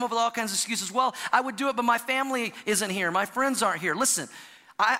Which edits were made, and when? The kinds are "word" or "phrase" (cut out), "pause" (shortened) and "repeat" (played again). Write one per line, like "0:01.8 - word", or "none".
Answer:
none